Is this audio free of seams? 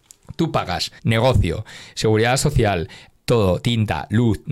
no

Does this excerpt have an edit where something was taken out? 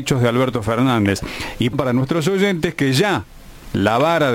yes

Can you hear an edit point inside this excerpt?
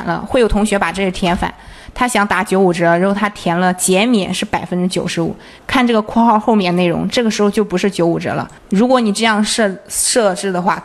yes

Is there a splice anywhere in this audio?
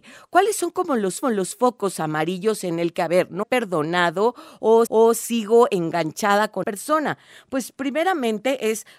yes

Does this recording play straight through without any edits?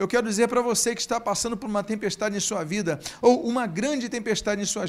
yes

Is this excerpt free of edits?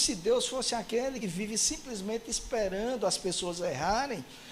no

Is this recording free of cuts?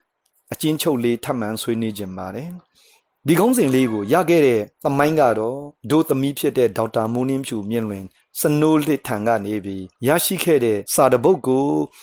no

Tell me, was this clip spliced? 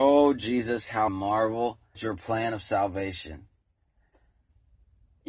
yes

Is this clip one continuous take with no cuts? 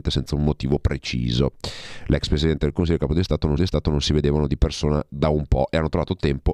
no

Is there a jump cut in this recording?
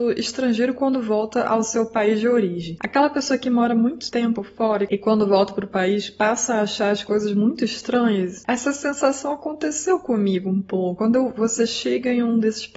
no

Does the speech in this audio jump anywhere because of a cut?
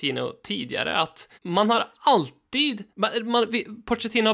yes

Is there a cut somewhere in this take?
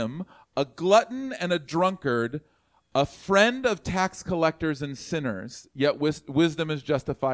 no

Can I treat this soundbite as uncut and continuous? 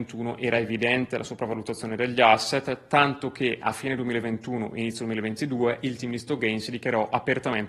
yes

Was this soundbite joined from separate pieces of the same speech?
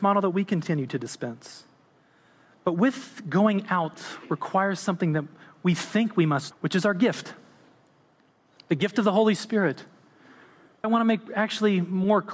yes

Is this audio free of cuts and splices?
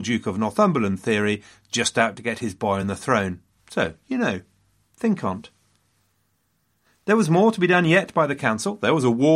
yes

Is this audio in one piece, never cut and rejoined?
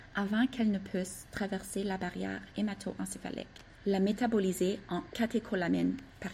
no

